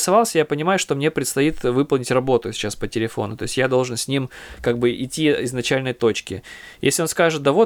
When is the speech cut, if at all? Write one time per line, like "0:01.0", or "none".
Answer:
none